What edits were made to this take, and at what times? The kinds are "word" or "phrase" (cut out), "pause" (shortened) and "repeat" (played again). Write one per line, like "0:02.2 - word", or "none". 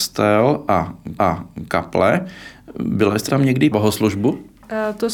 0:01.2 - repeat
0:03.3 - word
0:03.7 - phrase